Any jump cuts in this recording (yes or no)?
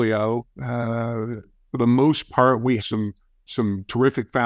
yes